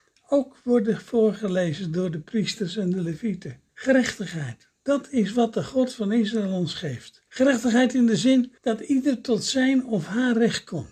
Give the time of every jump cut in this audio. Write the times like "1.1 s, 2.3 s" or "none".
3.7 s, 7.3 s, 8.6 s